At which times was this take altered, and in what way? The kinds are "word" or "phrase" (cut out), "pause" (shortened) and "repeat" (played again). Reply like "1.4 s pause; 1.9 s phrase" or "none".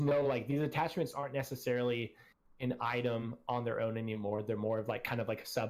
none